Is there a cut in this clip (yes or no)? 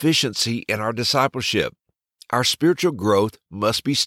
no